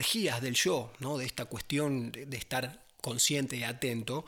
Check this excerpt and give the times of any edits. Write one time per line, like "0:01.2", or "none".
none